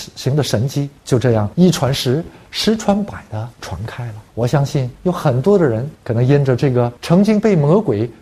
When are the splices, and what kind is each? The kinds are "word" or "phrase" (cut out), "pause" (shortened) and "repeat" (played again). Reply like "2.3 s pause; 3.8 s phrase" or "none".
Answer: 1.0 s pause; 1.5 s pause; 3.5 s pause; 4.3 s pause; 4.9 s pause; 5.9 s pause; 7.0 s pause